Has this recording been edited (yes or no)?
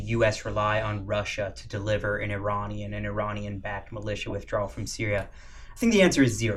no